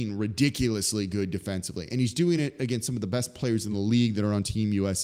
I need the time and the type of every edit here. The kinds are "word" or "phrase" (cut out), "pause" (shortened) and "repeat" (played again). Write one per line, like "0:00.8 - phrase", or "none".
none